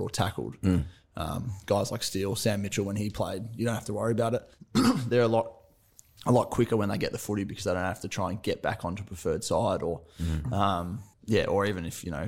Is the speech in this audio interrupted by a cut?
yes; 2 cuts; at 4.5 s, 11.1 s

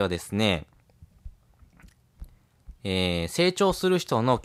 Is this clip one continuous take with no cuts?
yes; 0 cuts

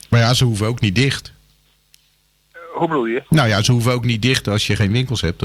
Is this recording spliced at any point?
no; 0 cuts

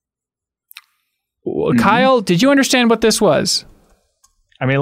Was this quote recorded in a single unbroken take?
yes; 0 cuts

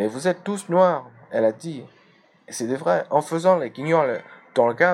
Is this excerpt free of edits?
yes; 0 cuts

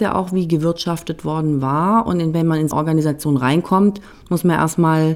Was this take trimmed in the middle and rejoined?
yes; 1 cut; at 2.7 s

